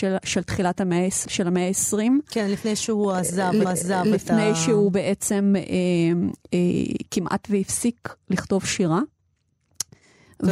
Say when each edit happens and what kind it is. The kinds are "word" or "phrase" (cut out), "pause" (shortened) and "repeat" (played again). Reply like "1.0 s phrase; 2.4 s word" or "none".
1.2 s word; 3.6 s repeat